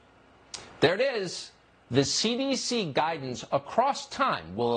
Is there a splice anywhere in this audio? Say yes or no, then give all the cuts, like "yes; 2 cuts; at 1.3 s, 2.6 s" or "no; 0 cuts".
no; 0 cuts